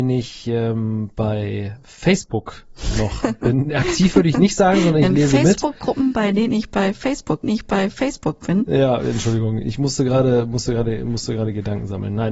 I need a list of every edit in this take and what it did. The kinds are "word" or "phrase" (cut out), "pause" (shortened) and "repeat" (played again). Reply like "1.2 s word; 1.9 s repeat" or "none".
7.4 s repeat